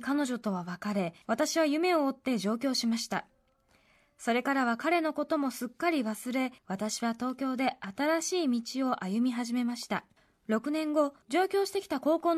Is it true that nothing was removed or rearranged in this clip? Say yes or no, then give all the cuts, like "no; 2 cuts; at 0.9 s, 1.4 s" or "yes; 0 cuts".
no; 4 cuts; at 1.2 s, 6.6 s, 10.2 s, 11.2 s